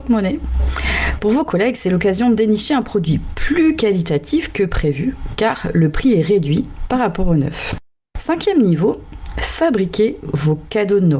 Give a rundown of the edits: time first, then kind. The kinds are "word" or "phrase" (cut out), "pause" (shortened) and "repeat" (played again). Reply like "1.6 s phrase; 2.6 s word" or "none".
none